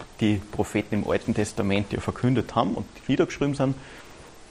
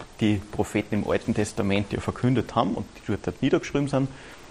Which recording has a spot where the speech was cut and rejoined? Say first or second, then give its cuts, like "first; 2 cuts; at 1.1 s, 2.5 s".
first; 1 cut; at 3.0 s